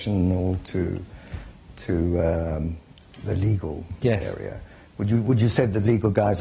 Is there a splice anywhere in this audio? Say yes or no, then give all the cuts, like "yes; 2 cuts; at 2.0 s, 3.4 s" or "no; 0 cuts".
no; 0 cuts